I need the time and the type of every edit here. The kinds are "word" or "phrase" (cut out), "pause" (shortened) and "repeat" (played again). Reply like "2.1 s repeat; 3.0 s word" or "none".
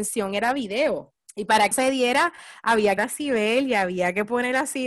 1.2 s pause; 1.7 s word; 3.0 s phrase